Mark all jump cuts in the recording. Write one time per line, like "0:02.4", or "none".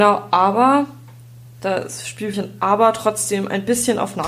0:01.5
0:02.3

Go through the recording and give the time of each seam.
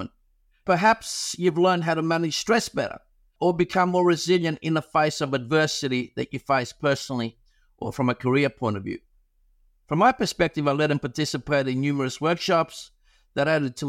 none

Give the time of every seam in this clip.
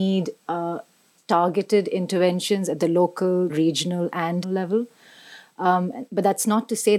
0:01.2
0:03.5
0:04.4

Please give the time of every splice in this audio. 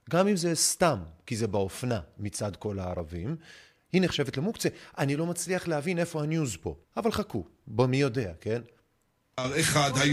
0:06.8

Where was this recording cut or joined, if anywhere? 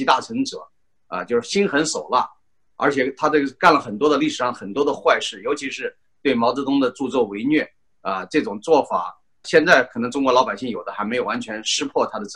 0:09.4

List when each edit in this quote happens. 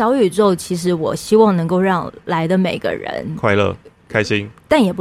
none

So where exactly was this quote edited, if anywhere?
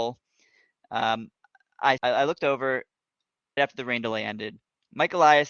0:02.0
0:03.6

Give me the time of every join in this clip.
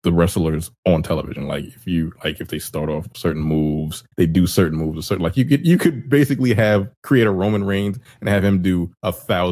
0:04.1

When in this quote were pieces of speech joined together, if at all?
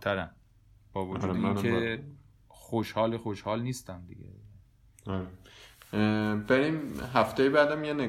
none

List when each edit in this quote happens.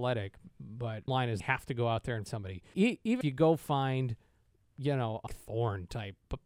0:01.1
0:01.4
0:02.3
0:02.7
0:03.2
0:05.3

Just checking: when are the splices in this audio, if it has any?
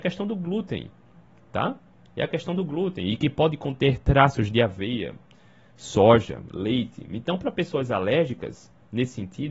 none

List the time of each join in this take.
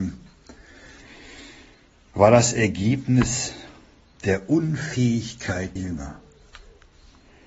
0:05.8

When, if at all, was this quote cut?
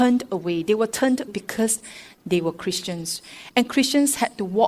0:01.3

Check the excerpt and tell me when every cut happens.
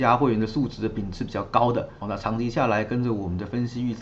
0:02.0

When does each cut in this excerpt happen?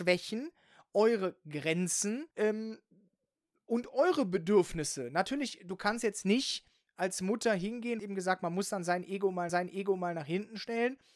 0:02.3
0:08.0
0:09.5

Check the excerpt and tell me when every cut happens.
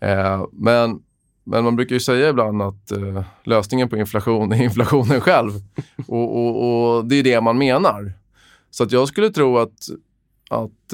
none

